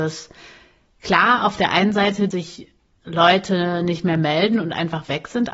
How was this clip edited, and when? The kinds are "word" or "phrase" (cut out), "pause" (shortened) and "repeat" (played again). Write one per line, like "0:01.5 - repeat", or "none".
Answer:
0:02.3 - word